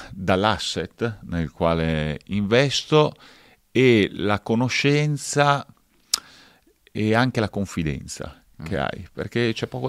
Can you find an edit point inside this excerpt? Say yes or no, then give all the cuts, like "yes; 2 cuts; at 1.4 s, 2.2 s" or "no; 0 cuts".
no; 0 cuts